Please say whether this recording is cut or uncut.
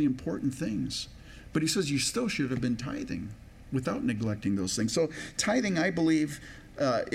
uncut